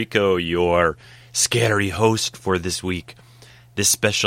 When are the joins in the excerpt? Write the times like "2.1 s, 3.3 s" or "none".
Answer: none